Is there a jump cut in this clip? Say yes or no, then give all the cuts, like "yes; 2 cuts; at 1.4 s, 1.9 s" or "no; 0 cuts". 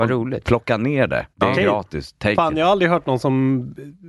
yes; 1 cut; at 1.3 s